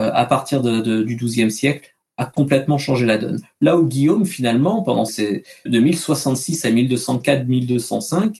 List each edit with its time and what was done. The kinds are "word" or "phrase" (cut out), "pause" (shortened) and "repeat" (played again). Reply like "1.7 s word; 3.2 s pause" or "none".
5.1 s word; 5.7 s word